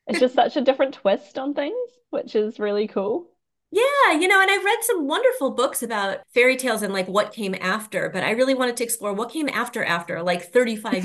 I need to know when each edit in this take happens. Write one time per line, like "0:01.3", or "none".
none